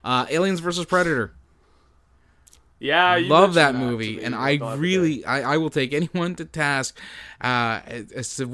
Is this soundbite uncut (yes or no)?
yes